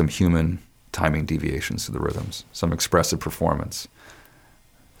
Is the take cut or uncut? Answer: uncut